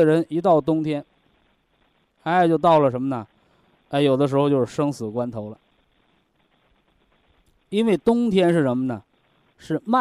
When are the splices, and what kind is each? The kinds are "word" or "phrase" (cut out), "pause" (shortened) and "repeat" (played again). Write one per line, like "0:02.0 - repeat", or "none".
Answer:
none